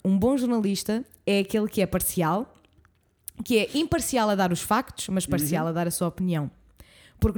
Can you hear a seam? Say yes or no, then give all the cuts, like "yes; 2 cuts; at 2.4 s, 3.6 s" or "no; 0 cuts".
no; 0 cuts